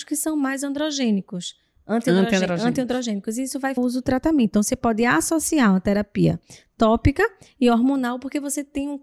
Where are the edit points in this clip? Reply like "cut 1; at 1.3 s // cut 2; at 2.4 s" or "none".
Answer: cut 1; at 3.8 s